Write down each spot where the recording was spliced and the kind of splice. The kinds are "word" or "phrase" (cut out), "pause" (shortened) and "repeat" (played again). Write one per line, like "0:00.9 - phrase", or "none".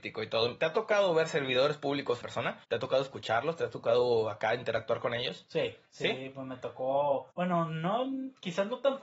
0:02.2 - phrase
0:02.6 - pause
0:07.3 - pause